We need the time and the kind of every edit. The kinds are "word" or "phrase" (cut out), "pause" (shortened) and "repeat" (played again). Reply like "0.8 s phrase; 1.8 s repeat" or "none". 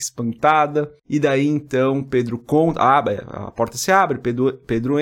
1.0 s pause